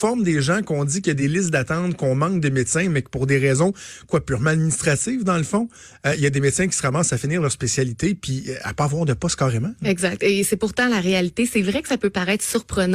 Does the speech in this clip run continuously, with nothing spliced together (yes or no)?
yes